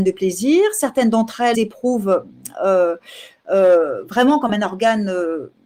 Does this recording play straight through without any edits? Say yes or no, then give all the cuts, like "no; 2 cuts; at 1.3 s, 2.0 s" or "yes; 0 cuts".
no; 1 cut; at 1.5 s